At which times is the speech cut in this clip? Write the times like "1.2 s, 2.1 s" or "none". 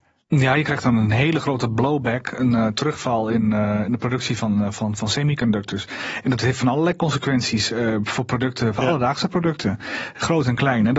none